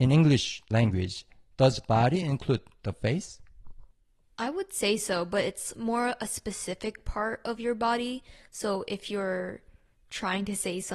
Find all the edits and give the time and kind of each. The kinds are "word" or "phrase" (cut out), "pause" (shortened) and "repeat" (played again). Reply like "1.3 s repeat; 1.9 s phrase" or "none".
none